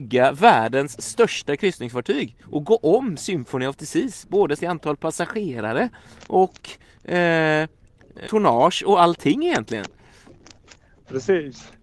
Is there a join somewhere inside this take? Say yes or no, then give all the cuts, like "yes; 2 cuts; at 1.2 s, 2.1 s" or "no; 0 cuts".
yes; 3 cuts; at 2.4 s, 4.6 s, 8.2 s